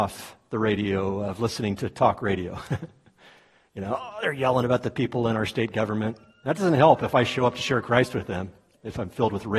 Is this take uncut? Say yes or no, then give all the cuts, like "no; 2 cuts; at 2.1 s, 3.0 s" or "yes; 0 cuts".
yes; 0 cuts